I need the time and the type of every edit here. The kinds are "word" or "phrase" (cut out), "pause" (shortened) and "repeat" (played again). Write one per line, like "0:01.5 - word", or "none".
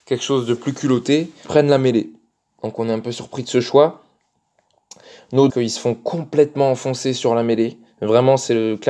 0:01.4 - word
0:05.5 - phrase